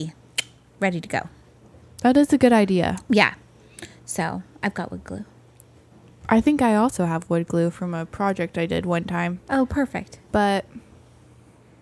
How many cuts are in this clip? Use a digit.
0